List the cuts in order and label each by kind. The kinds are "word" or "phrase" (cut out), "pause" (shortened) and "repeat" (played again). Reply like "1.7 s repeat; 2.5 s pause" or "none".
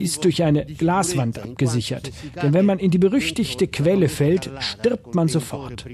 none